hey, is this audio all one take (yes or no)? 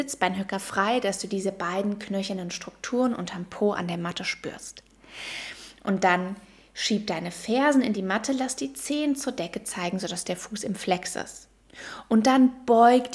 yes